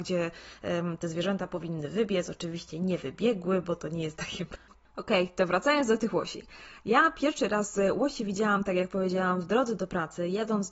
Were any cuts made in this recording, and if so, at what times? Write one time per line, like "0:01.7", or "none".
none